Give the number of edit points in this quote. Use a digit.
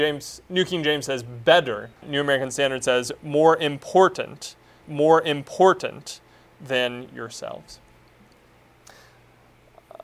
2